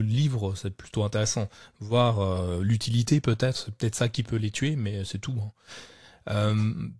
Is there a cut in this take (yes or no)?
no